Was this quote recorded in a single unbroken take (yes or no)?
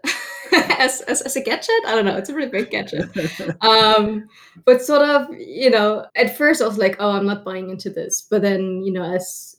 no